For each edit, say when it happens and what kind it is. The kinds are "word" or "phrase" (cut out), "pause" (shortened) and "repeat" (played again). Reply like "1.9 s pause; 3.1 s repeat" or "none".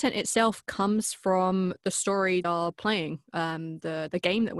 2.4 s phrase